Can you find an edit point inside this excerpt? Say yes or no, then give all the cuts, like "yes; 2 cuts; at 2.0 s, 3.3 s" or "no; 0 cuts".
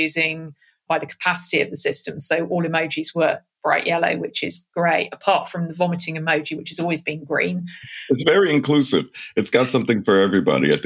no; 0 cuts